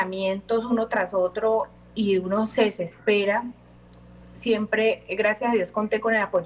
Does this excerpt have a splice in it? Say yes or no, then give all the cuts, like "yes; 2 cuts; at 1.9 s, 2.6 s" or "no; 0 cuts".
no; 0 cuts